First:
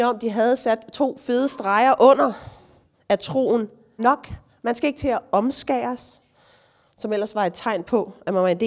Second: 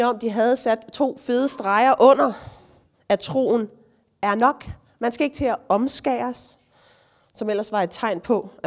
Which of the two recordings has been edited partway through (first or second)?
first